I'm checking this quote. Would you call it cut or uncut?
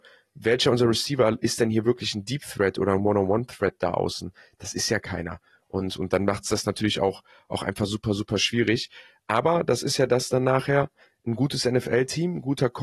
uncut